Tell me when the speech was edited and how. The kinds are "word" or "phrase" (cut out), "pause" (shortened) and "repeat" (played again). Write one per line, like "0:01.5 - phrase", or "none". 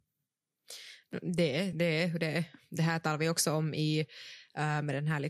none